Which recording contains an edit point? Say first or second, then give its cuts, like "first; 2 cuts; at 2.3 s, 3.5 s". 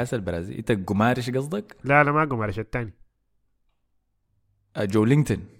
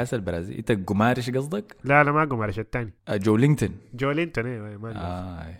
second; 1 cut; at 3.0 s